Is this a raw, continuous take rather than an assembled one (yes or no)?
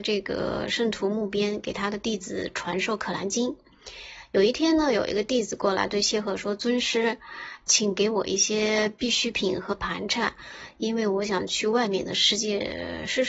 no